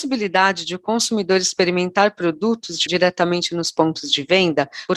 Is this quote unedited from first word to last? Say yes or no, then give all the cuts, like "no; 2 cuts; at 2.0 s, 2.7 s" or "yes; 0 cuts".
no; 1 cut; at 2.9 s